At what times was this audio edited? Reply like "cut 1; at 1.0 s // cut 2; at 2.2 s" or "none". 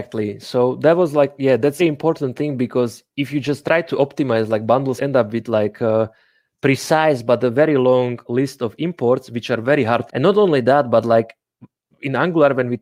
cut 1; at 1.8 s // cut 2; at 5.0 s // cut 3; at 10.1 s